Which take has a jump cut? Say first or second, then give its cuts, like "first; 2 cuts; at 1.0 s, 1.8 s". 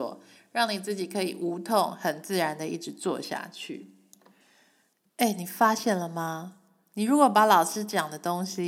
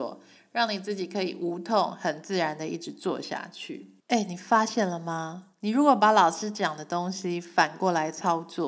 second; 2 cuts; at 4.0 s, 5.5 s